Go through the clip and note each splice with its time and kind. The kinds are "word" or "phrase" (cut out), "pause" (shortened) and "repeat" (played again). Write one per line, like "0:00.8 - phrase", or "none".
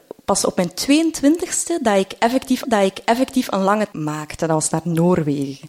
0:02.6 - repeat
0:03.9 - word